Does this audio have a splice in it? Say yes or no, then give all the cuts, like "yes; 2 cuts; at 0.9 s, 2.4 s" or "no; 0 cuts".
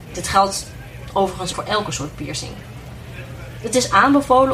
yes; 1 cut; at 1.5 s